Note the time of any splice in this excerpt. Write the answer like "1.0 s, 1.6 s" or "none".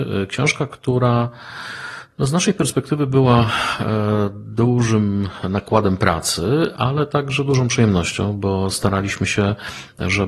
none